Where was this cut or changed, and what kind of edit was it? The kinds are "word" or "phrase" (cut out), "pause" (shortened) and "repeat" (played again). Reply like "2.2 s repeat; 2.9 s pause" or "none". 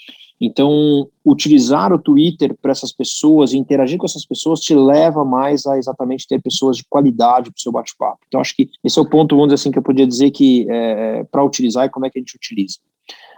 8.8 s pause